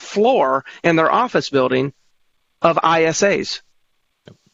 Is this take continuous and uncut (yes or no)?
yes